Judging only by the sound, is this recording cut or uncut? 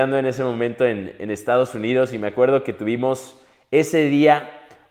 uncut